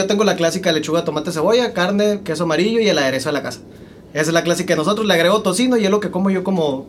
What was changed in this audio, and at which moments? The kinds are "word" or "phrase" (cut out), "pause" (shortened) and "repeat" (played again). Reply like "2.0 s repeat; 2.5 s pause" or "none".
none